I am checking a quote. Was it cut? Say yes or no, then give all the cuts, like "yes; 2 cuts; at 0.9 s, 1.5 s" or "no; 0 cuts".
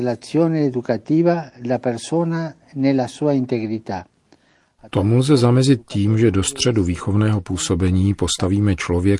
no; 0 cuts